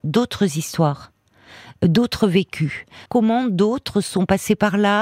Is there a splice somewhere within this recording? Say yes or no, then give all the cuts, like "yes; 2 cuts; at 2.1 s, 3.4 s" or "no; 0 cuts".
yes; 1 cut; at 3.1 s